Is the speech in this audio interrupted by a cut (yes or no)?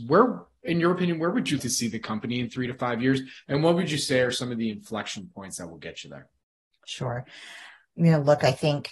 yes